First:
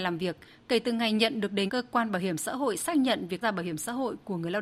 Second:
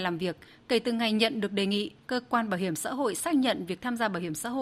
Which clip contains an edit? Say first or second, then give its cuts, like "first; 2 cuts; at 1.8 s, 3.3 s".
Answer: first; 2 cuts; at 1.7 s, 3.4 s